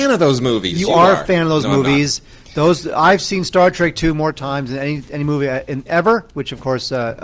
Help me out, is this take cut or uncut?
uncut